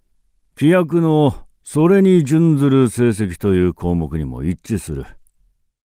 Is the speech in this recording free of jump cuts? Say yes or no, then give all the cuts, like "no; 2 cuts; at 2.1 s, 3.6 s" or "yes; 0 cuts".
yes; 0 cuts